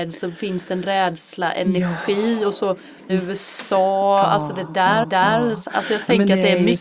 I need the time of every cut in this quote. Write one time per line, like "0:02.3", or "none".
0:03.1
0:05.0

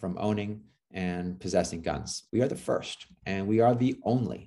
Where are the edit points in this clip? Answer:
0:02.3

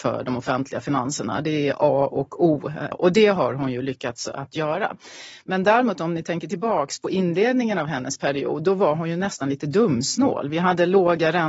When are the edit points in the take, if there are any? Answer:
0:02.9

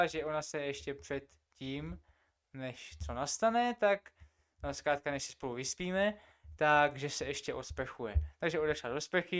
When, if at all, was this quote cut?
none

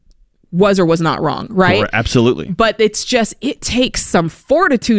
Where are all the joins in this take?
none

